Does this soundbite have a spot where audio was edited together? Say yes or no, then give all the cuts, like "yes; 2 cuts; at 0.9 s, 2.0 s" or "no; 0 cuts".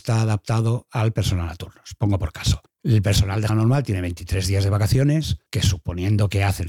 yes; 2 cuts; at 3.5 s, 5.5 s